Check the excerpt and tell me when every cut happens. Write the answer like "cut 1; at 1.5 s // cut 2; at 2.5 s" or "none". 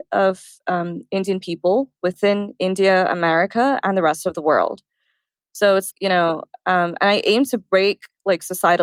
cut 1; at 5.9 s